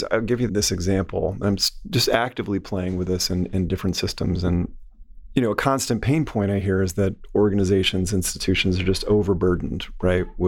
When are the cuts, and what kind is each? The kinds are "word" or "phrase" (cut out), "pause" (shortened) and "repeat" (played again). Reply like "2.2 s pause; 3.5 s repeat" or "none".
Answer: none